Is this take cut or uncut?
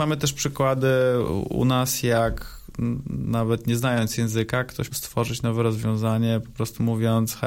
cut